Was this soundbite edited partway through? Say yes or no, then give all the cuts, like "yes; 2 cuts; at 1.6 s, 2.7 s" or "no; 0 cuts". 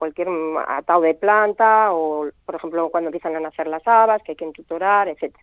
yes; 1 cut; at 2.4 s